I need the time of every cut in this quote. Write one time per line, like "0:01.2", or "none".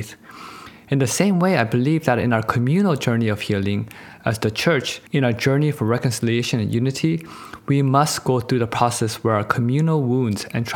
0:05.1